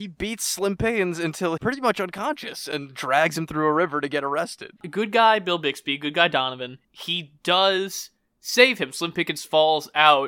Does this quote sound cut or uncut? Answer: cut